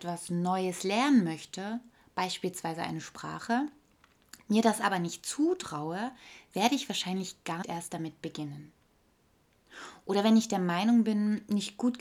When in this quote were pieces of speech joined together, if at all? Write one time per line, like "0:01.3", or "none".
0:07.6